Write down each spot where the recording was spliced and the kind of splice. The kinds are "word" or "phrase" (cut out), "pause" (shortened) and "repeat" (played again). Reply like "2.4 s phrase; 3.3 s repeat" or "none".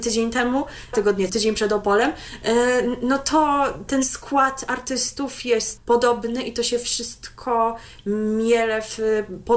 0.9 s phrase; 1.3 s phrase; 3.9 s word; 5.8 s word